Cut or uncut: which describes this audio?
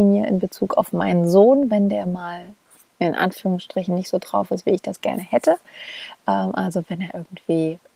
uncut